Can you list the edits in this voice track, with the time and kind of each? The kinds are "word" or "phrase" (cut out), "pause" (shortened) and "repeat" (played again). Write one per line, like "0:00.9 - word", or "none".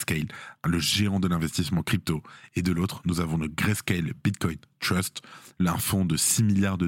none